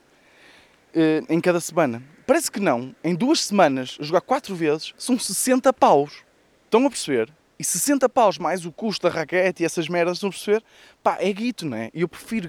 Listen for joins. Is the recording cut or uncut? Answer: cut